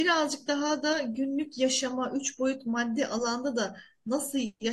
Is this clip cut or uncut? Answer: uncut